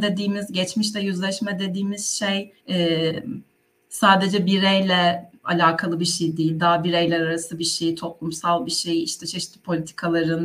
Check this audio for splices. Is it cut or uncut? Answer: cut